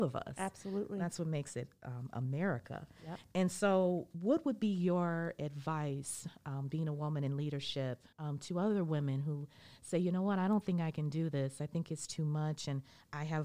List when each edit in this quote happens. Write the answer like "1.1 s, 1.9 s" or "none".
8.1 s

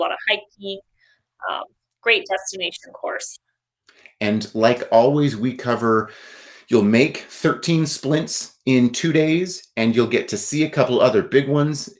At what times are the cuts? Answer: none

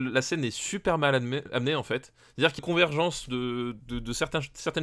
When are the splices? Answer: 2.6 s

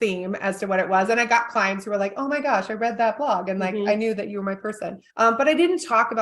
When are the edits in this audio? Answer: 5.1 s

